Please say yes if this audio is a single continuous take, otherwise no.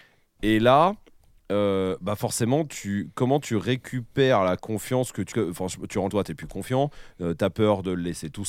no